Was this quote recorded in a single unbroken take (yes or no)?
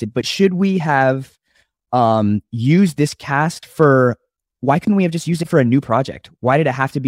yes